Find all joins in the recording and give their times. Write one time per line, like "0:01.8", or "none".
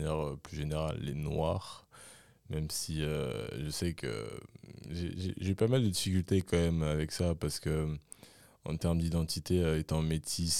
none